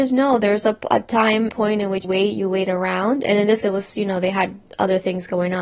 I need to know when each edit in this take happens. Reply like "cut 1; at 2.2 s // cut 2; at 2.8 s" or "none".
cut 1; at 1.5 s // cut 2; at 2.0 s // cut 3; at 3.6 s